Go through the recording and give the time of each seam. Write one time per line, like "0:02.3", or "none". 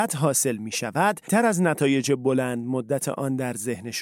0:01.3